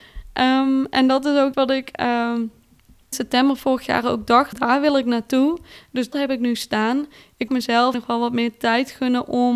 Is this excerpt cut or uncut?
cut